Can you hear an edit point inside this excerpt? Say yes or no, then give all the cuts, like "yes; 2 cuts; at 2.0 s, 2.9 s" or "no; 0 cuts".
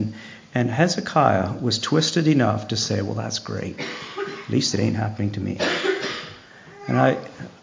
no; 0 cuts